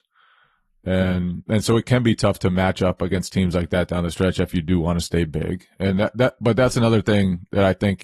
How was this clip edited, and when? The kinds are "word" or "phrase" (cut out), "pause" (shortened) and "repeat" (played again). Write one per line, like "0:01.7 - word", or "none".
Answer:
none